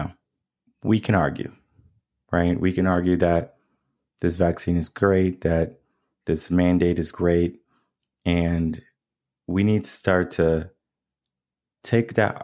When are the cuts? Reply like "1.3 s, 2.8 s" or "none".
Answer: none